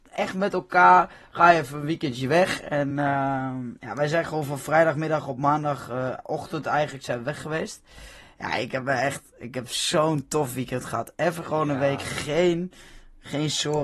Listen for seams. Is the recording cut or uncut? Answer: uncut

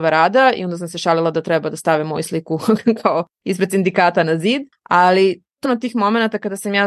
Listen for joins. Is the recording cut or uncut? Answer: cut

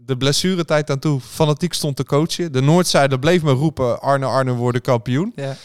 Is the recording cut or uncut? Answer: uncut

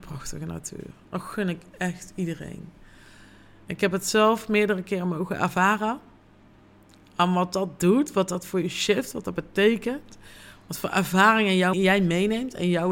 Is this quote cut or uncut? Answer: cut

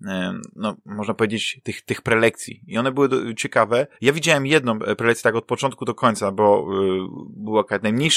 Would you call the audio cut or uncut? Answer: cut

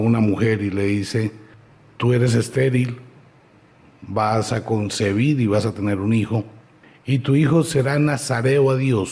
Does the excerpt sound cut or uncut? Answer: uncut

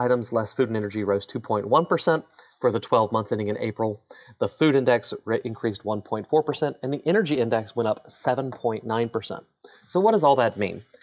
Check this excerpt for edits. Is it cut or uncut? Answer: uncut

